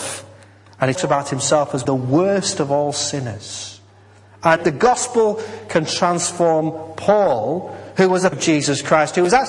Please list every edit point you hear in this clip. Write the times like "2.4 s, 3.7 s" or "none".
1.0 s, 1.9 s, 4.6 s, 8.3 s